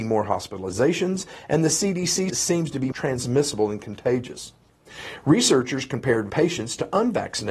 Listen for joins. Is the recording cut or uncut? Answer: cut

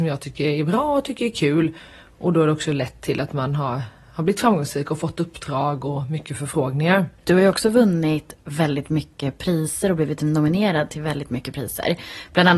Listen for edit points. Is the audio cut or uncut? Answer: cut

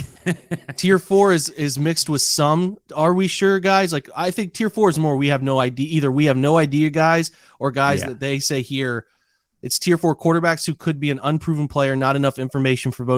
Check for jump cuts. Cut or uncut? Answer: uncut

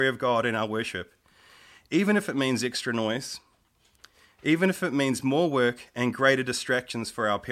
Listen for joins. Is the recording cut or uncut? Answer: uncut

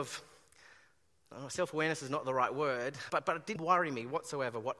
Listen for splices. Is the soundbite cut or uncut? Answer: cut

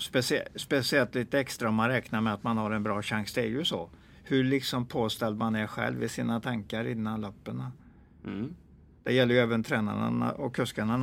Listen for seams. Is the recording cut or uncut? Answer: uncut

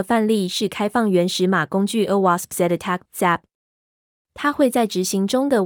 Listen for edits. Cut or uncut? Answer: cut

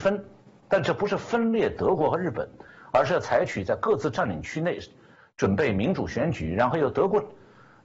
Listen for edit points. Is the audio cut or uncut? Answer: uncut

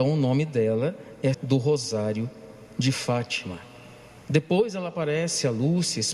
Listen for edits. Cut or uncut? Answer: cut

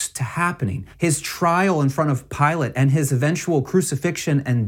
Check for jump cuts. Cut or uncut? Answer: cut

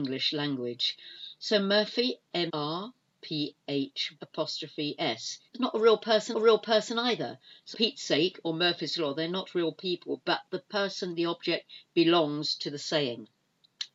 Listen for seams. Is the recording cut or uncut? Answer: cut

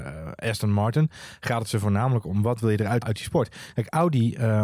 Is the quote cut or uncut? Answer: cut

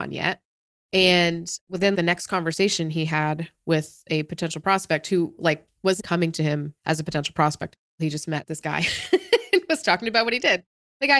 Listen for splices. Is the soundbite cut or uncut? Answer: cut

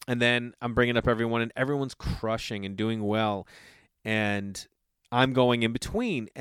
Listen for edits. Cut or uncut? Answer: uncut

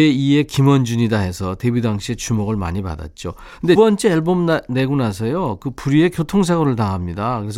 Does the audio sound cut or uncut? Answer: cut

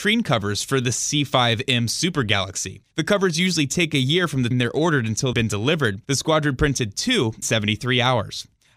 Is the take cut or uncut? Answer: cut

